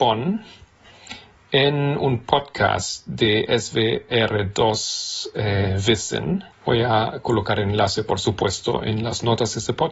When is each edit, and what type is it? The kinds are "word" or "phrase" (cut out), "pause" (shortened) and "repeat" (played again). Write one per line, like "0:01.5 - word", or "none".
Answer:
0:06.5 - pause